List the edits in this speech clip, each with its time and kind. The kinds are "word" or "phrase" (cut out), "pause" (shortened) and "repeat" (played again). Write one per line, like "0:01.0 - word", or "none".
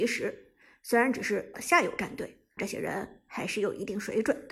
0:01.5 - word
0:02.6 - phrase